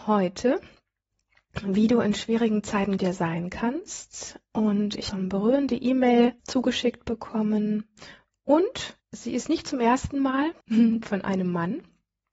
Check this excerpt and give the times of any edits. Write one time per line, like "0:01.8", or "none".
0:03.0
0:05.1
0:06.4
0:09.0
0:10.6